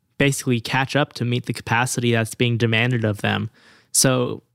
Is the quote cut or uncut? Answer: uncut